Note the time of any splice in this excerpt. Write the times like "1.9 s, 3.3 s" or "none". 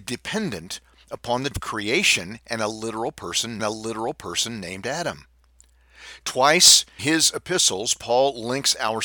1.5 s, 3.6 s, 7.0 s